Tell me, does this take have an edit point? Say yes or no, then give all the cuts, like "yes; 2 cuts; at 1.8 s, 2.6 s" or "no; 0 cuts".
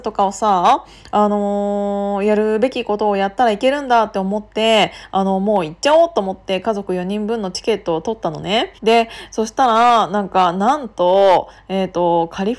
yes; 1 cut; at 8.8 s